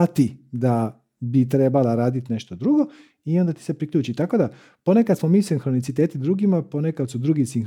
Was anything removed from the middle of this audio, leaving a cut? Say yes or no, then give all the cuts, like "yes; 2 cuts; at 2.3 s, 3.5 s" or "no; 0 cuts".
no; 0 cuts